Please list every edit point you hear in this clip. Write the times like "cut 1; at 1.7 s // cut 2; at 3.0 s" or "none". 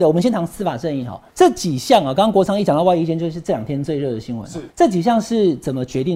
cut 1; at 1.3 s // cut 2; at 4.7 s